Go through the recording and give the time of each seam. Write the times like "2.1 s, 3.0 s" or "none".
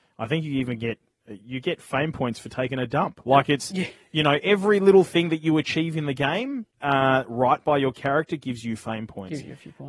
6.7 s